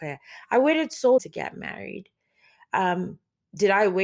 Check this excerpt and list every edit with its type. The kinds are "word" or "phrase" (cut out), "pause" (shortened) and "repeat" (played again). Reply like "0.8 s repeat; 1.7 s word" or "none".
1.2 s word